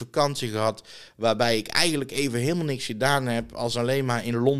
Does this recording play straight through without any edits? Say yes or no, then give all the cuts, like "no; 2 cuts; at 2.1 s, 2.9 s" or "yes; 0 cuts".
yes; 0 cuts